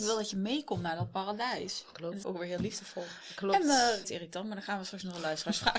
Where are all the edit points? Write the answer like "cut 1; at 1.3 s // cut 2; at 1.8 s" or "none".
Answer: cut 1; at 2.2 s // cut 2; at 4.0 s